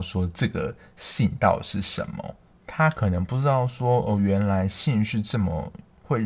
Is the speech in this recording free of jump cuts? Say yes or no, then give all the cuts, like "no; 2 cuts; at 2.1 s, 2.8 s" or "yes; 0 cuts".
yes; 0 cuts